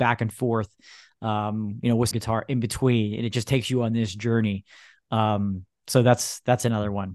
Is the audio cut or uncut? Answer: cut